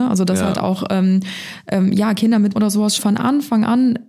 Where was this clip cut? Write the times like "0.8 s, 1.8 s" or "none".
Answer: 2.5 s, 3.0 s

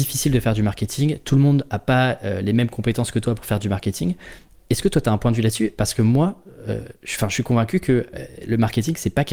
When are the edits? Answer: none

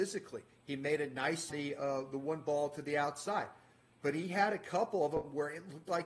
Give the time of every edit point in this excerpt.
1.5 s

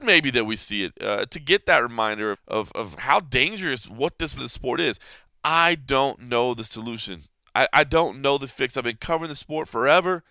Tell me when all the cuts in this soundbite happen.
2.3 s, 4.4 s

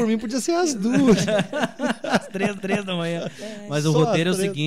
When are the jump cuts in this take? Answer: 2.6 s

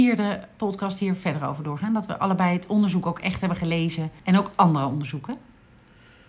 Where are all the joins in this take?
4.2 s

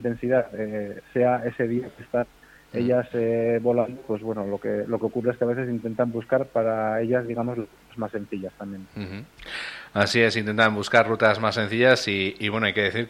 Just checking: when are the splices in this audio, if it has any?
none

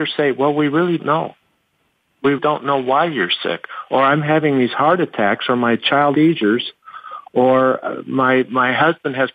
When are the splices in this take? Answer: 1.0 s, 2.4 s, 6.1 s, 7.8 s

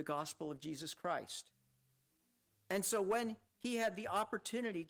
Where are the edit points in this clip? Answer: none

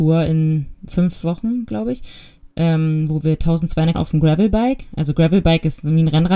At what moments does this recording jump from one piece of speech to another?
3.9 s

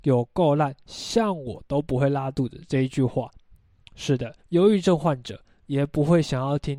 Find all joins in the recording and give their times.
3.9 s, 4.4 s

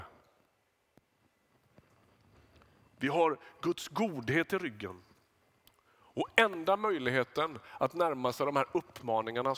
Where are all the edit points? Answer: none

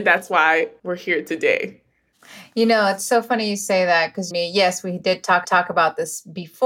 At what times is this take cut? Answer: 4.3 s, 5.4 s

